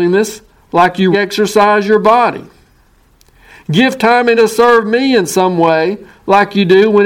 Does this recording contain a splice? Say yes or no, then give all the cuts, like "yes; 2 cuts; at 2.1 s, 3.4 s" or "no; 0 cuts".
yes; 2 cuts; at 1.1 s, 4.4 s